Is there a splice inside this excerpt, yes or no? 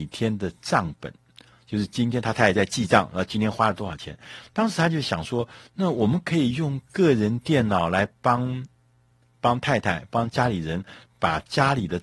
no